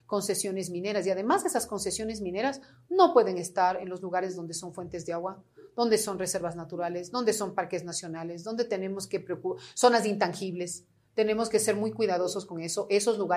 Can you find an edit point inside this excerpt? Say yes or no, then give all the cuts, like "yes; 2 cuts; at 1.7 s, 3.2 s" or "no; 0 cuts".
no; 0 cuts